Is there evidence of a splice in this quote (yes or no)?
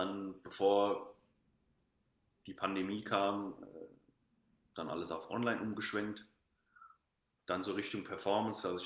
no